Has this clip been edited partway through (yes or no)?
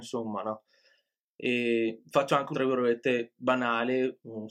yes